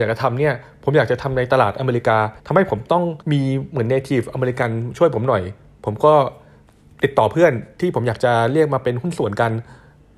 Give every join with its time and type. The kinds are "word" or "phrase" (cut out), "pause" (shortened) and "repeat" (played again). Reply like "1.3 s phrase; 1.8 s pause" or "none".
2.4 s pause; 3.2 s pause